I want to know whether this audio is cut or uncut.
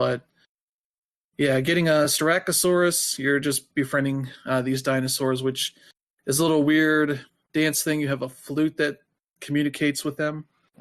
uncut